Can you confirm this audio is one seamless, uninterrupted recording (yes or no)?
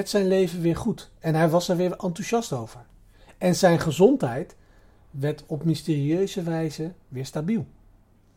yes